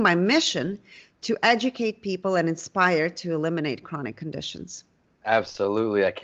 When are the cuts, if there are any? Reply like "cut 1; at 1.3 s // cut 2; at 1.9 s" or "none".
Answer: none